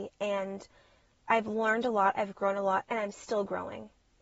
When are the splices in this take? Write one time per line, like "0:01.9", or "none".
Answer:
none

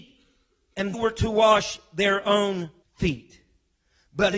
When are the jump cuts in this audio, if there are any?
0:00.9
0:02.8

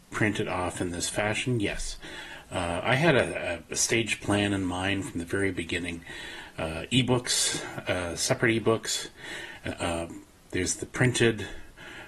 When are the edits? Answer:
0:09.7

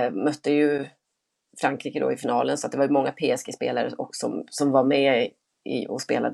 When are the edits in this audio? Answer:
none

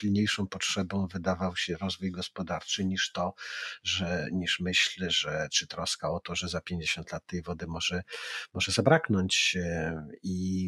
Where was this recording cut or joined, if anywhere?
none

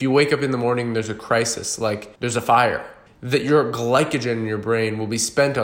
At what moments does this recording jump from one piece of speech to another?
0:02.1
0:03.1

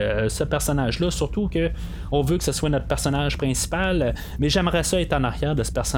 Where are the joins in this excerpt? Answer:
none

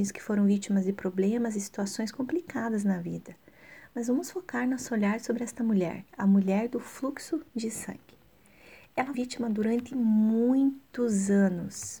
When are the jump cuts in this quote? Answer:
0:06.1
0:07.5
0:09.1

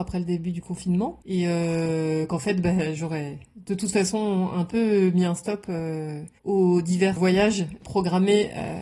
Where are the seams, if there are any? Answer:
0:01.2
0:06.4

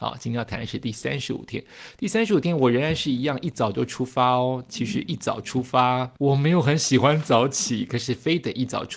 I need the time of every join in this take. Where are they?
0:06.2

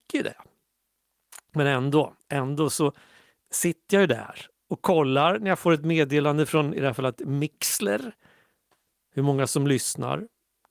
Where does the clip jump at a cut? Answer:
0:02.2

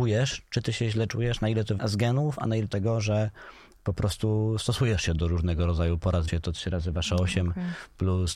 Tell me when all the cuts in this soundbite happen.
0:01.8
0:02.7
0:06.3

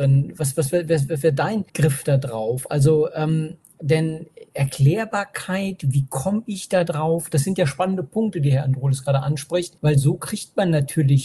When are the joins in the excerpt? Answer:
0:01.7
0:04.5
0:09.8

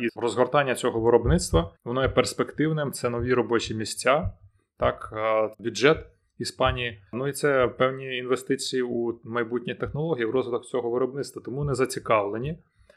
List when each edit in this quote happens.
0:01.8
0:05.5
0:07.1

